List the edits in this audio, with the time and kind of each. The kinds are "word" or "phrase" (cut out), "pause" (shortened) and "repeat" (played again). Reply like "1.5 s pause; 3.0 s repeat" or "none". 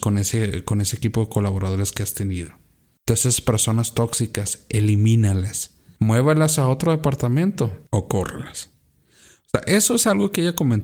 none